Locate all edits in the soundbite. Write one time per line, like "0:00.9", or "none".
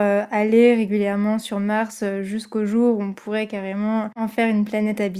none